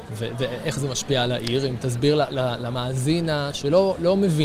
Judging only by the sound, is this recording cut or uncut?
uncut